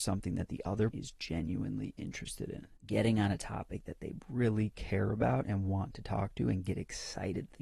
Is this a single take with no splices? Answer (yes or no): no